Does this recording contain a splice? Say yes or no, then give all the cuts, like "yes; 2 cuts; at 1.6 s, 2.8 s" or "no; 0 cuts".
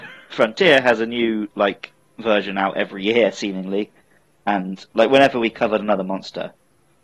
no; 0 cuts